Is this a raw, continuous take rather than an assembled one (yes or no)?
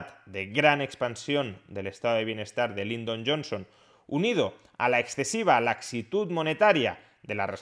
yes